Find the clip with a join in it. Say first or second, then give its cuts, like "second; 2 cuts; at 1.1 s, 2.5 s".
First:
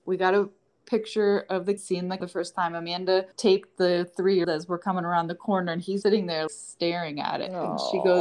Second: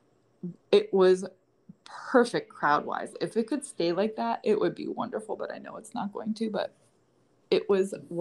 first; 6 cuts; at 1.8 s, 2.2 s, 3.3 s, 4.4 s, 6.0 s, 6.5 s